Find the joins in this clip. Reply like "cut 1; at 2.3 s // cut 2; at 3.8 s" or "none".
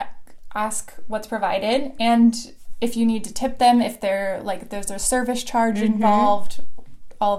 none

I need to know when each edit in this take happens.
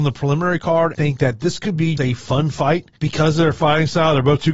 cut 1; at 0.9 s // cut 2; at 2.0 s // cut 3; at 3.0 s

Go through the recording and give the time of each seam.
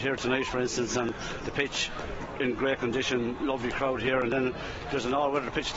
none

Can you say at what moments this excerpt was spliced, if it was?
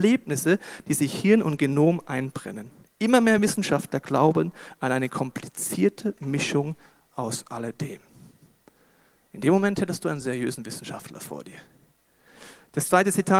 none

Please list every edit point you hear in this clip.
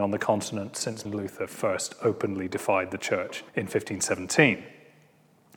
cut 1; at 1.0 s // cut 2; at 3.5 s

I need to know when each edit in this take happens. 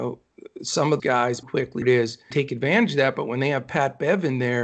cut 1; at 1.0 s // cut 2; at 1.4 s // cut 3; at 1.8 s // cut 4; at 2.3 s

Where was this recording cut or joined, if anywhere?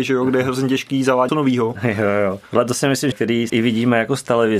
cut 1; at 1.3 s // cut 2; at 3.1 s // cut 3; at 3.5 s

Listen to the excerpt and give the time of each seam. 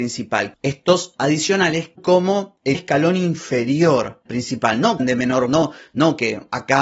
cut 1; at 1.1 s // cut 2; at 2.0 s // cut 3; at 2.7 s // cut 4; at 4.3 s // cut 5; at 5.0 s // cut 6; at 5.5 s

